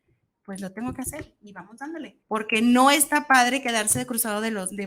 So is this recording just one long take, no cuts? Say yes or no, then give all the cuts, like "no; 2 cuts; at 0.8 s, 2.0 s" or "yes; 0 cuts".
no; 1 cut; at 2.2 s